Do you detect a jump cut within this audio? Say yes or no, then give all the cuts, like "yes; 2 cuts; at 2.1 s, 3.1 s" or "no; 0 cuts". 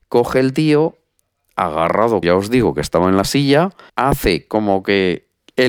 yes; 2 cuts; at 2.2 s, 3.9 s